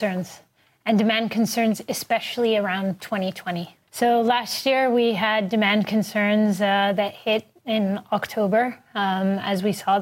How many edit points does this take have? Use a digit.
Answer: 1